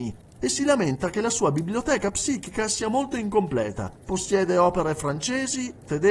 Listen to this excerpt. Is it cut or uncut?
cut